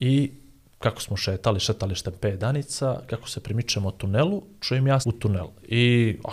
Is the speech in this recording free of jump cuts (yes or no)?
no